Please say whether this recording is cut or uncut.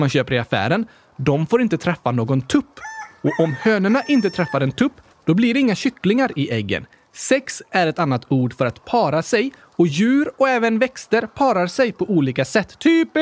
uncut